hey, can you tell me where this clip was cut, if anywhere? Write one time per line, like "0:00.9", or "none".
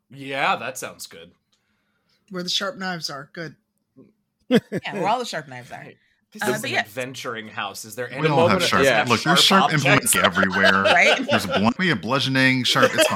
0:10.1
0:11.8